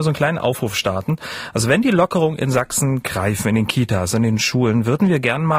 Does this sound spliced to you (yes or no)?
no